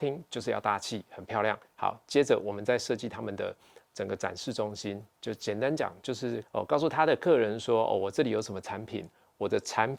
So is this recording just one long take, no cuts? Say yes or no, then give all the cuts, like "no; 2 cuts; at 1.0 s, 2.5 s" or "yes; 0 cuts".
yes; 0 cuts